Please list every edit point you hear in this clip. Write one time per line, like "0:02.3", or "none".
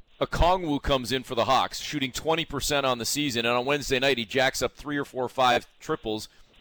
none